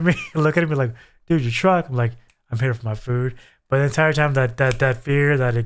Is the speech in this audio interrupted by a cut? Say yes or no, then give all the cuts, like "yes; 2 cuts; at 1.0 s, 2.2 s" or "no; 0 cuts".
no; 0 cuts